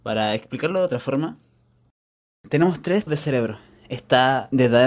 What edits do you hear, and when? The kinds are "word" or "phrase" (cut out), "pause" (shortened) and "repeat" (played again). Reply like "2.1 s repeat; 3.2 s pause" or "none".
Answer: 3.1 s word